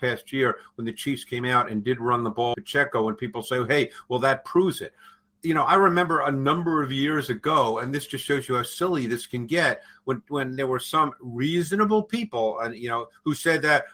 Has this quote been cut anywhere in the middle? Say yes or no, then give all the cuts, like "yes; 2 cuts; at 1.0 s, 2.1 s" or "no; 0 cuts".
yes; 1 cut; at 2.5 s